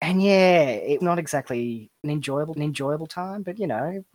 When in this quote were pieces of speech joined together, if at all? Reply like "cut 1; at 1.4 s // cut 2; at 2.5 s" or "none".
cut 1; at 1.0 s // cut 2; at 2.0 s // cut 3; at 2.5 s